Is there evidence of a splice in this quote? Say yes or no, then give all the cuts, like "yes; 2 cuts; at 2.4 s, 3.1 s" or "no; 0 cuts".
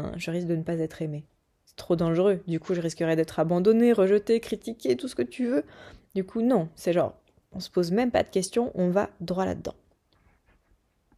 no; 0 cuts